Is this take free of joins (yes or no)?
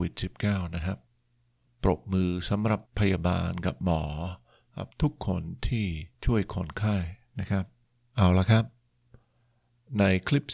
no